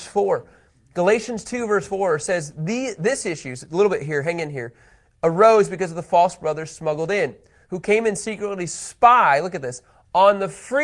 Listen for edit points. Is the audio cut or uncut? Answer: uncut